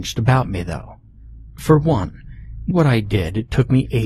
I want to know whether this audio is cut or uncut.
cut